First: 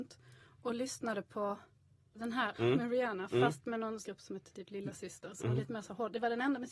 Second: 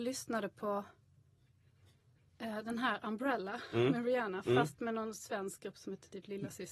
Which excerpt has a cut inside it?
first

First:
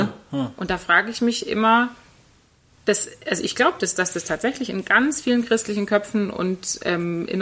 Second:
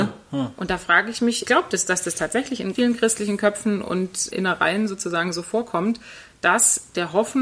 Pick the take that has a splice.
second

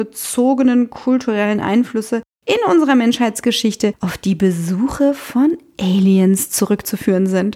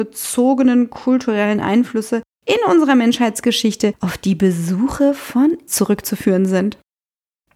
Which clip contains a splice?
second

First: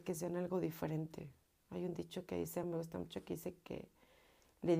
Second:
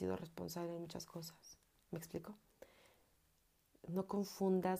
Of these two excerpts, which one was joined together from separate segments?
first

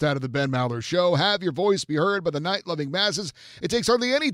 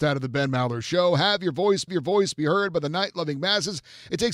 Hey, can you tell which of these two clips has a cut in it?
second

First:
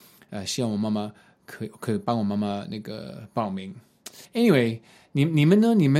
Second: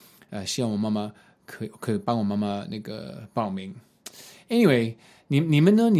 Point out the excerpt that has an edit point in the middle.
first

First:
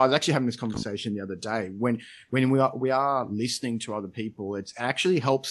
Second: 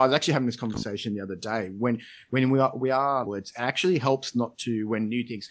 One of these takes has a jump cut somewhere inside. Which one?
second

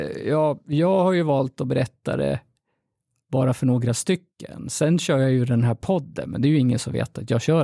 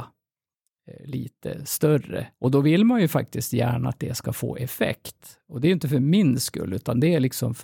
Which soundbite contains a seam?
second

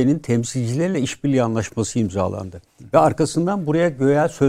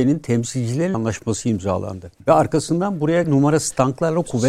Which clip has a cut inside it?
second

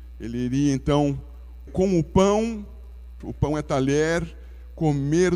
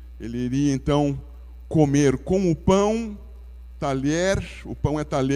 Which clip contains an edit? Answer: first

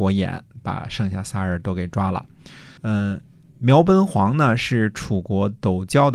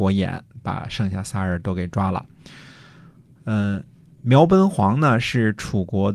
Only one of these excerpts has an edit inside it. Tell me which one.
first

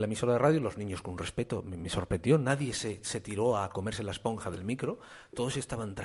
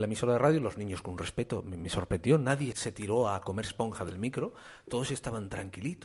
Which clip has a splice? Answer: second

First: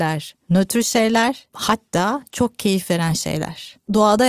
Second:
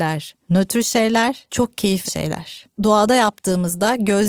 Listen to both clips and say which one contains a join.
second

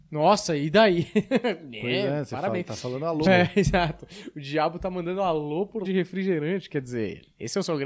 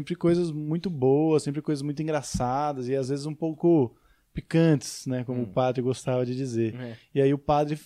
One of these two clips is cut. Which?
first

